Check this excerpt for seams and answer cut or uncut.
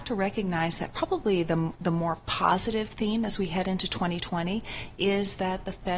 uncut